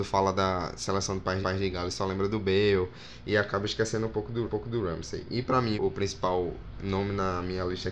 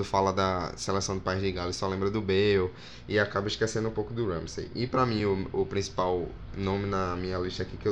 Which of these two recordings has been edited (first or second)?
first